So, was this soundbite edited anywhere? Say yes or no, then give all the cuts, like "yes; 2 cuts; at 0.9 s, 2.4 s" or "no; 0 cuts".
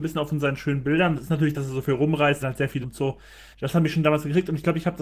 yes; 5 cuts; at 1.1 s, 1.5 s, 2.4 s, 2.8 s, 3.5 s